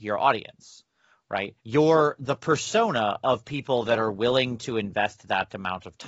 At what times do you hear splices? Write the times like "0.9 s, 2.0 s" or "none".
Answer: 1.6 s